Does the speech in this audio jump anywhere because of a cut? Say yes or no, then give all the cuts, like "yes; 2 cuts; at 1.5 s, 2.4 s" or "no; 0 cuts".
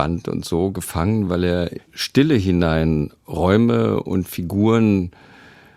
yes; 1 cut; at 1.8 s